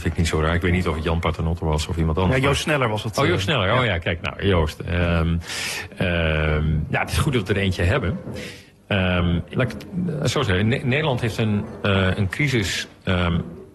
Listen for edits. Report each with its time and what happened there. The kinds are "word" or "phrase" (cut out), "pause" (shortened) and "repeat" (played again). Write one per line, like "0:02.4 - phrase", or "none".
0:09.5 - word